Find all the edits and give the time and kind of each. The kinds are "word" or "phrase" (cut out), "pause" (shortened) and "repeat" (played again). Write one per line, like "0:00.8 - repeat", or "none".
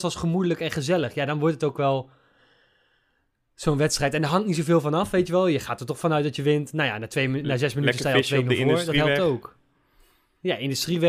none